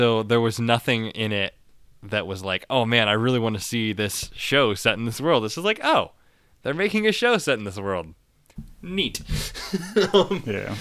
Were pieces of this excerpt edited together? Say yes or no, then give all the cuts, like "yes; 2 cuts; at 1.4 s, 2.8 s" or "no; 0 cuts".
no; 0 cuts